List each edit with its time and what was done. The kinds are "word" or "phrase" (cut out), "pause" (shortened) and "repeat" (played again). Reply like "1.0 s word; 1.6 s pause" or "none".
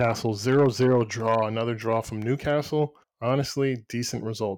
3.0 s pause